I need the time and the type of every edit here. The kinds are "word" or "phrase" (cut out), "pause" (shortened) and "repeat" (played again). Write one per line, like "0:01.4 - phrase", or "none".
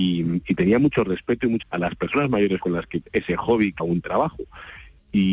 0:01.6 - word
0:03.0 - word
0:03.8 - word

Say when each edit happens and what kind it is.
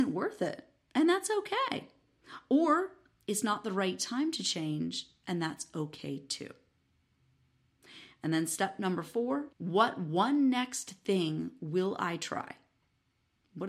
0:09.5 - pause

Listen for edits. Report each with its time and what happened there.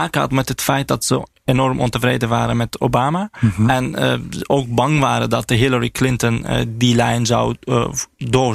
none

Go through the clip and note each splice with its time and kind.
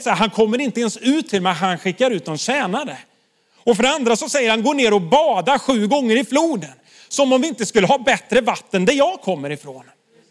none

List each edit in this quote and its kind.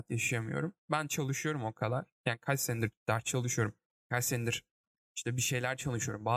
none

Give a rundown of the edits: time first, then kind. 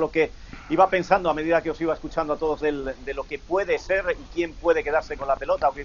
0:02.6 - word

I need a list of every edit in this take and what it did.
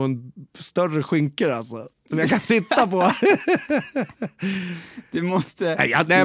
none

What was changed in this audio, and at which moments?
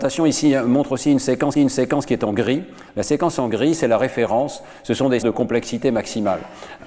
0:01.5 - repeat
0:05.2 - word

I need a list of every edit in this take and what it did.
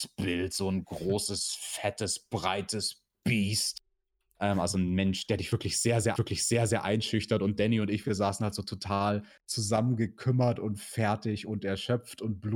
0:06.2 - repeat

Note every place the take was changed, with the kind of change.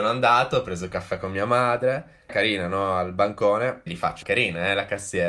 0:02.3 - phrase
0:03.9 - word
0:04.2 - word

